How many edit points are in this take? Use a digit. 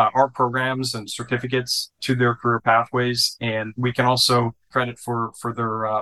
1